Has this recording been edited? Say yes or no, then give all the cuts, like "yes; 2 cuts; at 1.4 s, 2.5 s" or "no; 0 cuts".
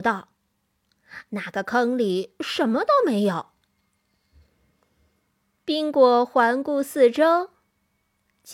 no; 0 cuts